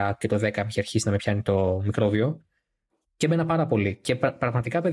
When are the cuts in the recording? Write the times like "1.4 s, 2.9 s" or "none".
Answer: none